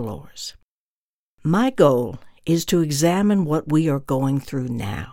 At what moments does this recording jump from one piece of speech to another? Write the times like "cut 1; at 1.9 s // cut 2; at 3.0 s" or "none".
none